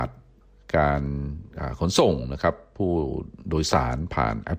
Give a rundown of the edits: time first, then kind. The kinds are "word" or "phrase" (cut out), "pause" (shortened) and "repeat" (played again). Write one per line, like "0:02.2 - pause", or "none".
none